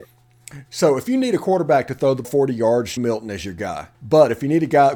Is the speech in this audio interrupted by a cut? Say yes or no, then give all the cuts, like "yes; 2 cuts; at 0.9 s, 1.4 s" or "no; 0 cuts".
yes; 3 cuts; at 2.2 s, 3.0 s, 3.9 s